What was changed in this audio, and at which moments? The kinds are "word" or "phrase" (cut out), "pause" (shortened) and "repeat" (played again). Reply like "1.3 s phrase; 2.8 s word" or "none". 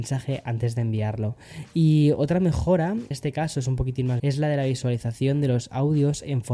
3.1 s word; 4.2 s word